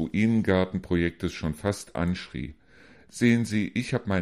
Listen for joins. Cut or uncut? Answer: uncut